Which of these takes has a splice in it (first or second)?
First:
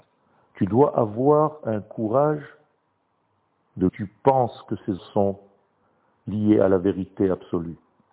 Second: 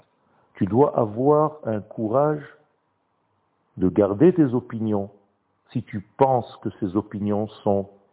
first